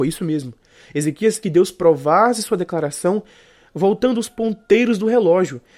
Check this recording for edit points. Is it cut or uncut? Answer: cut